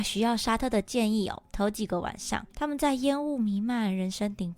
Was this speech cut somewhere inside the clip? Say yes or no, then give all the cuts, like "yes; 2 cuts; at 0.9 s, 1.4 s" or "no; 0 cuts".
yes; 1 cut; at 2.5 s